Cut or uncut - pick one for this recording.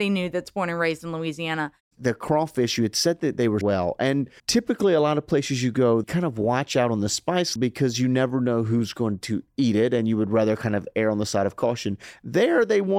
cut